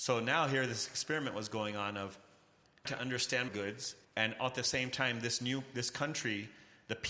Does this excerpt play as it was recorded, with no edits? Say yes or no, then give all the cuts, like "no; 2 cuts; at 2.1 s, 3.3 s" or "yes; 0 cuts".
no; 3 cuts; at 2.9 s, 3.5 s, 4.0 s